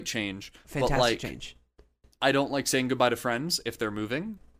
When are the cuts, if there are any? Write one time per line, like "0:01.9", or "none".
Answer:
none